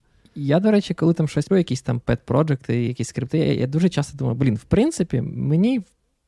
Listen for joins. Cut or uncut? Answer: cut